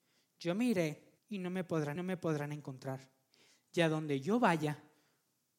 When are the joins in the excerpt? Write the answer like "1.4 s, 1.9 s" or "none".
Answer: 1.2 s, 2.0 s